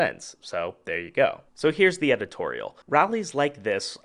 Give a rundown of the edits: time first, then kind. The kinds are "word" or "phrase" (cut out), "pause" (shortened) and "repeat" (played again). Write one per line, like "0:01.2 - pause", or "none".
0:01.5 - pause
0:02.8 - pause